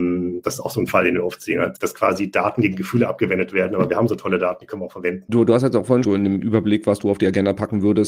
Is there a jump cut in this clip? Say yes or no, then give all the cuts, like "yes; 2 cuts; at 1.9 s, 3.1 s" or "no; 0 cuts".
yes; 1 cut; at 6.0 s